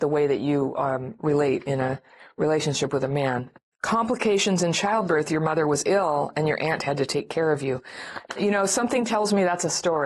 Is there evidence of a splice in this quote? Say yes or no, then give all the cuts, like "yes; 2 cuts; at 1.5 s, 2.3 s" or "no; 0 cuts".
no; 0 cuts